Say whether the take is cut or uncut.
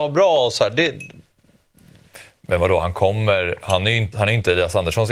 cut